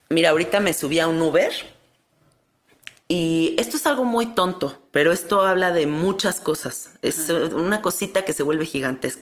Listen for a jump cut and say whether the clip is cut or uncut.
uncut